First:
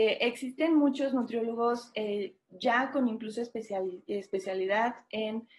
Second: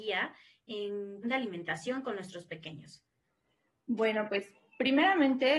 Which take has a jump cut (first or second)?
second